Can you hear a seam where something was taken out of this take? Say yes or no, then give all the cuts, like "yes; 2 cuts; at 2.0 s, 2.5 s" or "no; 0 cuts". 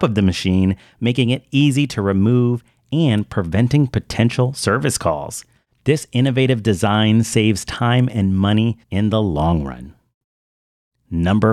yes; 1 cut; at 8.8 s